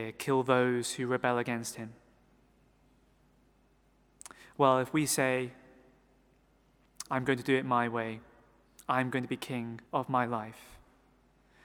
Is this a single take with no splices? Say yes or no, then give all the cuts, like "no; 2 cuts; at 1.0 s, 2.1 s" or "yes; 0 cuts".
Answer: no; 1 cut; at 9.9 s